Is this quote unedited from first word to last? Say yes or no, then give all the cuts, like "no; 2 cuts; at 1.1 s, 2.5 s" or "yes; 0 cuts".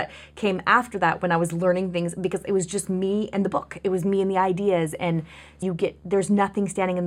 no; 1 cut; at 5.6 s